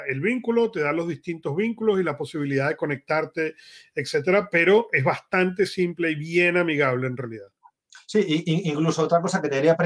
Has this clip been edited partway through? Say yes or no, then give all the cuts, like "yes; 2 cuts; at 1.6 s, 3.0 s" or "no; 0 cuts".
no; 0 cuts